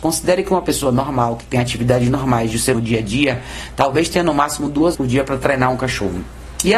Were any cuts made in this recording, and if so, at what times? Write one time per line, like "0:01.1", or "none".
0:02.7
0:04.9